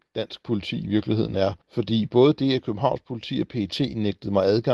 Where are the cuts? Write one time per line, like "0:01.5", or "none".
0:01.6